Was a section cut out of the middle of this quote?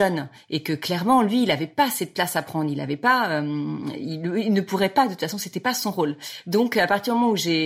no; 0 cuts

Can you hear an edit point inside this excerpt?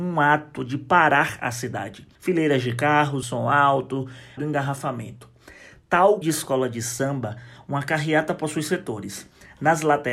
yes; 4 cuts; at 2.2 s, 3.2 s, 4.4 s, 6.2 s

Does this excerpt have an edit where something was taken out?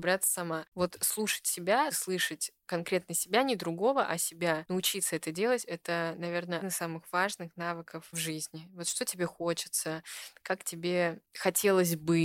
yes; 3 cuts; at 1.9 s, 6.6 s, 8.1 s

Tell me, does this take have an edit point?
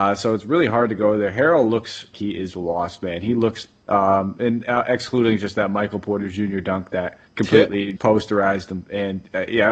yes; 4 cuts; at 2.1 s, 3.8 s, 7.3 s, 8.0 s

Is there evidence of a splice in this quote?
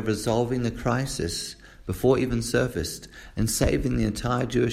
no; 0 cuts

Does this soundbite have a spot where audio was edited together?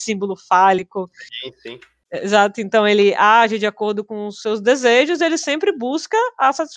no; 0 cuts

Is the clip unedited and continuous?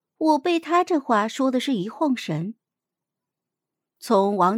yes; 0 cuts

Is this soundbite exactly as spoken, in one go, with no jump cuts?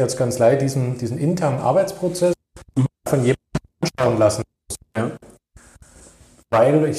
yes; 0 cuts

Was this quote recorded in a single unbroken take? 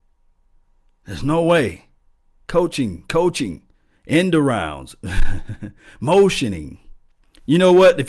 no; 1 cut; at 3.7 s

